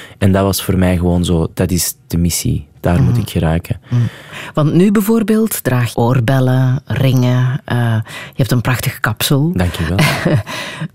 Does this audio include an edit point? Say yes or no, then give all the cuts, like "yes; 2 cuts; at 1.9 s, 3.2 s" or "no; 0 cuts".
yes; 2 cuts; at 1.5 s, 5.9 s